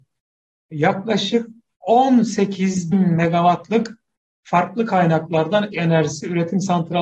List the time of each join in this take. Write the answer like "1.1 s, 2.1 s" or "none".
2.9 s, 5.7 s